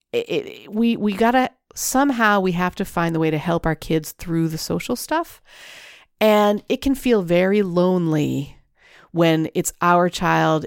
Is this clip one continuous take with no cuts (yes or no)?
yes